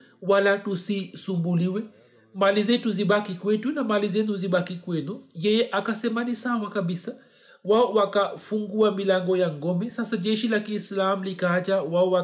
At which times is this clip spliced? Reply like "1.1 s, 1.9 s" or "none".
none